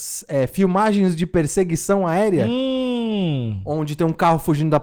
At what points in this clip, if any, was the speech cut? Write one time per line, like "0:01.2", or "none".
none